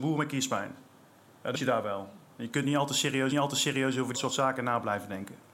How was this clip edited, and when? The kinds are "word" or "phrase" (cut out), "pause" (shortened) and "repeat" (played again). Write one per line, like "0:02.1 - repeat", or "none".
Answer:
0:01.5 - word
0:03.3 - repeat
0:04.1 - phrase